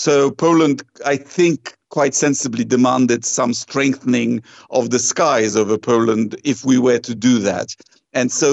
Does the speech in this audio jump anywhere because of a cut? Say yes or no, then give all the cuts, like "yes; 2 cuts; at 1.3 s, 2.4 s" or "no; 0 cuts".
no; 0 cuts